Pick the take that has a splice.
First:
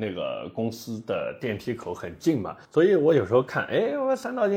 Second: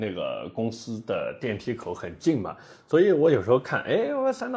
first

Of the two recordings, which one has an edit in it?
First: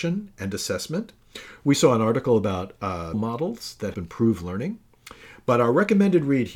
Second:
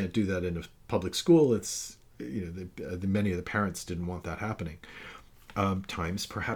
first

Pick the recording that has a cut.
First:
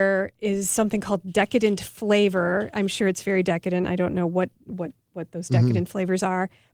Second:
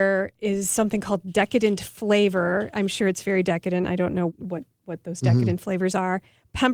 second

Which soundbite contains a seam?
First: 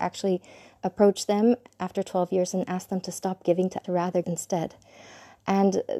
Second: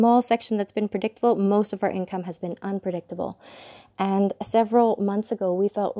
first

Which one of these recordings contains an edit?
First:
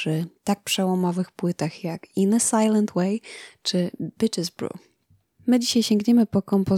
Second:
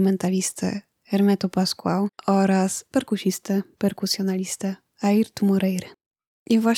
second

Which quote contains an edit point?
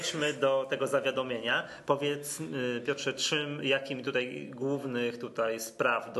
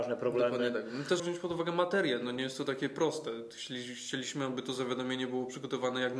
second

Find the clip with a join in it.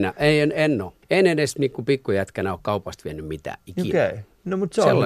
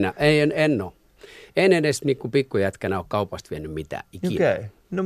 first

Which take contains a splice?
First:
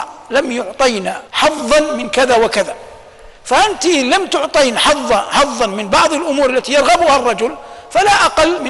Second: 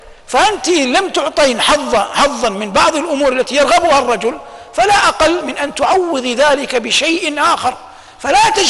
first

